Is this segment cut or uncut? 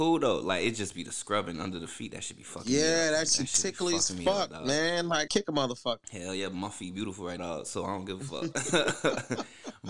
cut